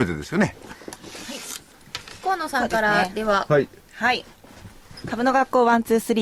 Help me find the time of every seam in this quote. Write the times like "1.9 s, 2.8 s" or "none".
none